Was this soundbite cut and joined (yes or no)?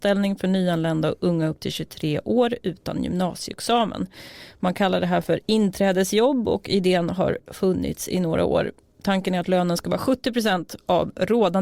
no